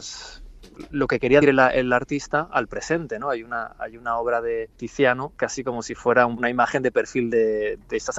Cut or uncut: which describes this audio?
cut